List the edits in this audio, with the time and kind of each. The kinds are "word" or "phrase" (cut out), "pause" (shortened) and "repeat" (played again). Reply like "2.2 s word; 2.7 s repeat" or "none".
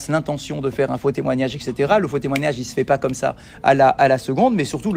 none